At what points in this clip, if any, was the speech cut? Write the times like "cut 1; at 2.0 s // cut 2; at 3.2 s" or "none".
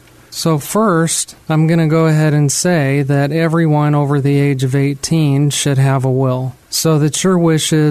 cut 1; at 1.4 s // cut 2; at 6.6 s